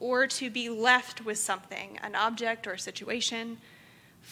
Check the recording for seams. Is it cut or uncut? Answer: uncut